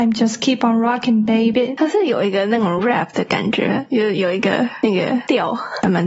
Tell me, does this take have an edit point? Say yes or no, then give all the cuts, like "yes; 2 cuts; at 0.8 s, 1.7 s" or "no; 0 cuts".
no; 0 cuts